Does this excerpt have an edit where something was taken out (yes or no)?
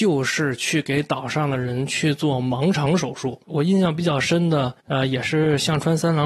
yes